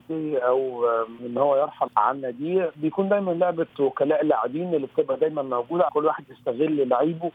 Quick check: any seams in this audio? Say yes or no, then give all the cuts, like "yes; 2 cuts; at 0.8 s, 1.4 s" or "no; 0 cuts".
yes; 3 cuts; at 1.2 s, 1.9 s, 5.9 s